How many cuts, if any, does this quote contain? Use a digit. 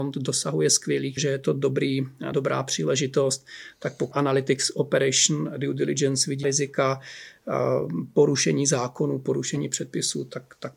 4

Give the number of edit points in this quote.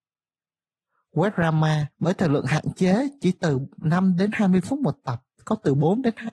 1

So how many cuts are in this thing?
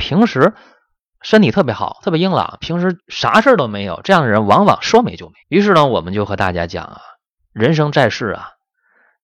2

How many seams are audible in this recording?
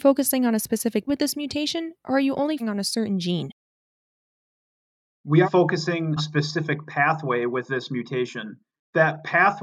4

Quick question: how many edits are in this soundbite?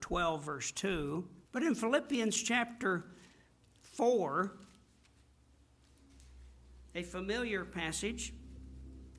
1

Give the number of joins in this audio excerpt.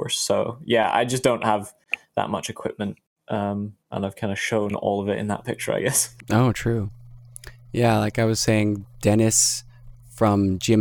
1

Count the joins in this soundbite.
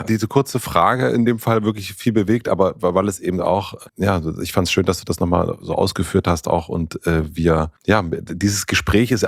2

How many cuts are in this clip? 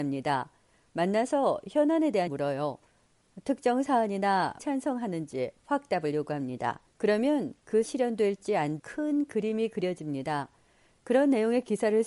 6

